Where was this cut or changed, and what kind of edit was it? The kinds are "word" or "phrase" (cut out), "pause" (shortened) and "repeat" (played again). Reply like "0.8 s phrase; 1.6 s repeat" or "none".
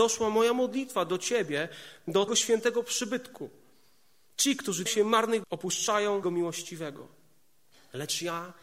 2.3 s word; 4.9 s word; 5.4 s word; 6.2 s word